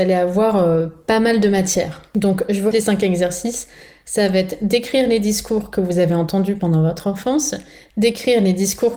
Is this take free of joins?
no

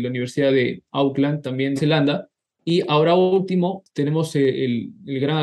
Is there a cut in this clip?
yes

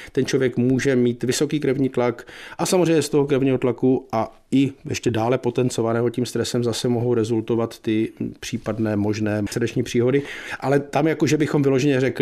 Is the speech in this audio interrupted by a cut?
yes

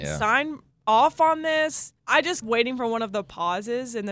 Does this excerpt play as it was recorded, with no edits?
no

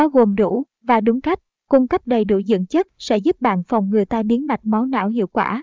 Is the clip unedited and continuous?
yes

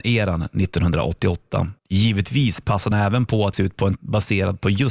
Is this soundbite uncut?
no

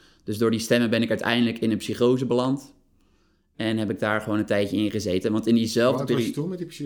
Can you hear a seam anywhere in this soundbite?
no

